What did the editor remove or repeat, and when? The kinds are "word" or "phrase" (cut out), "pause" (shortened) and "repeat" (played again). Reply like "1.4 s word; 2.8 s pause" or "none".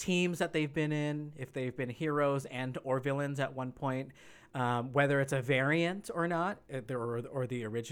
none